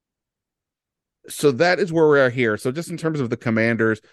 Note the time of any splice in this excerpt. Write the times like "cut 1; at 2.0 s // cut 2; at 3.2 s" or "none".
none